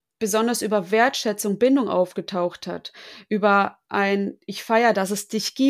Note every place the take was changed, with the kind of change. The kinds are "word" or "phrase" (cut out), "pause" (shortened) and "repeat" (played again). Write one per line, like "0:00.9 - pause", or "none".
none